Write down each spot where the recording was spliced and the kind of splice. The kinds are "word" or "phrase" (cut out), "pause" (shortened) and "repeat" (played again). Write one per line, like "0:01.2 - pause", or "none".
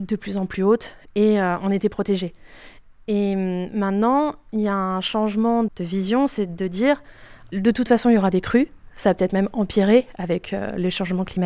none